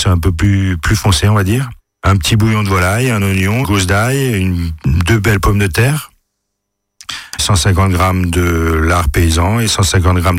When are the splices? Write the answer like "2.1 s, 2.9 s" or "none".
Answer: 1.8 s, 3.6 s, 7.4 s